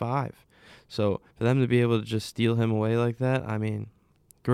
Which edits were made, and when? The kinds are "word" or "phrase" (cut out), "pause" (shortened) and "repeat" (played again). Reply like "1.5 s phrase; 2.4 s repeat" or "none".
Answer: 1.3 s pause

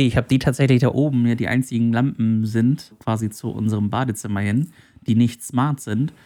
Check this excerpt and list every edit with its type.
0.9 s phrase; 2.9 s word

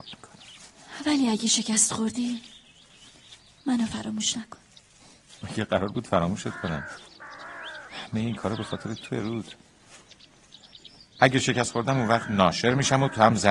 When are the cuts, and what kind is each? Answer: none

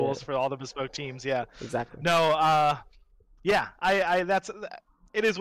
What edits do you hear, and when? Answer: none

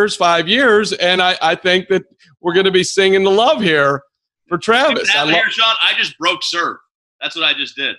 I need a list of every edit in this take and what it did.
none

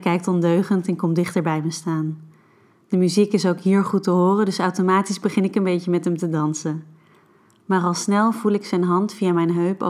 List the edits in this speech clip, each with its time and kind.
none

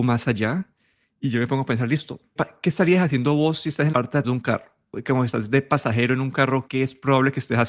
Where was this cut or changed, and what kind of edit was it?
2.4 s word; 3.9 s word; 4.2 s word; 6.7 s word

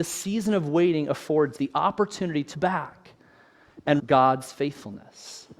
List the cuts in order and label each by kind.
1.6 s word; 2.5 s word; 4.0 s word

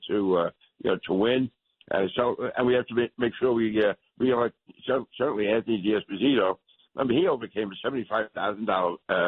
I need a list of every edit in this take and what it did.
none

